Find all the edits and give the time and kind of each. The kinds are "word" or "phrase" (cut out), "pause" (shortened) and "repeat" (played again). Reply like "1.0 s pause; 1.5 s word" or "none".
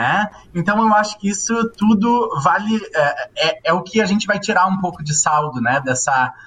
none